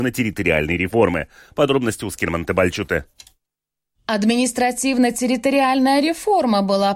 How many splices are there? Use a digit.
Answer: 0